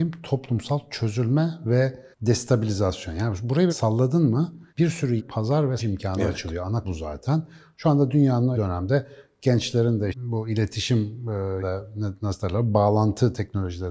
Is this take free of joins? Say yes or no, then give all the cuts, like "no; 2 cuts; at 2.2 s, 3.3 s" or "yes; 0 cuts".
no; 9 cuts; at 2.1 s, 3.7 s, 4.7 s, 5.2 s, 5.8 s, 6.8 s, 8.5 s, 10.1 s, 11.6 s